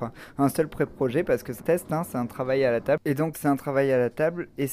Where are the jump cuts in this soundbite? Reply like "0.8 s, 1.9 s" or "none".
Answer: 1.6 s, 3.3 s